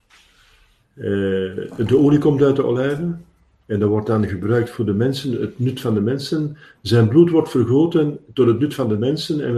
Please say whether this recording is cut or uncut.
uncut